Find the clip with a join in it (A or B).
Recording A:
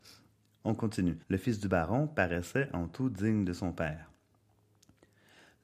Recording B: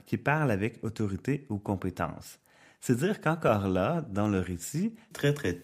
A